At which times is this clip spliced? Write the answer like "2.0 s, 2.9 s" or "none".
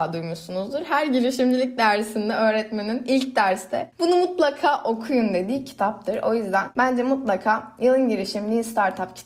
none